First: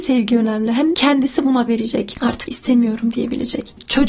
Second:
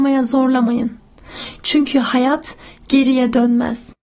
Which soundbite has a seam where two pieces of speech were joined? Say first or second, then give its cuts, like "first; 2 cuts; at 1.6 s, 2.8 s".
first; 3 cuts; at 0.9 s, 1.7 s, 2.5 s